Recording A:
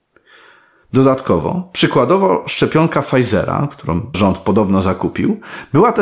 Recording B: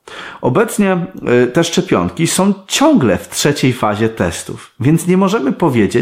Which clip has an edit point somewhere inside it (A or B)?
A